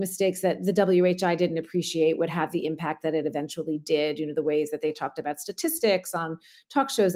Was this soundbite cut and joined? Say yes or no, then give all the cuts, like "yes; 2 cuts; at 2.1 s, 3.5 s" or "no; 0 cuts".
no; 0 cuts